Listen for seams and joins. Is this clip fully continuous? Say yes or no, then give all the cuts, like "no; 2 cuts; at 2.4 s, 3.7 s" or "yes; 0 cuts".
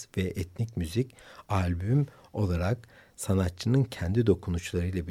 yes; 0 cuts